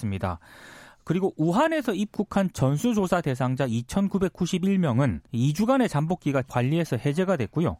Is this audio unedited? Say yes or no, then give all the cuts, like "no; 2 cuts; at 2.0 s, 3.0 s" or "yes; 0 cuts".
no; 2 cuts; at 5.3 s, 6.4 s